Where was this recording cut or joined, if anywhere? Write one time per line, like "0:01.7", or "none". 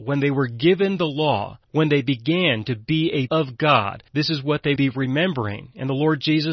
0:01.6
0:03.3
0:04.1
0:04.8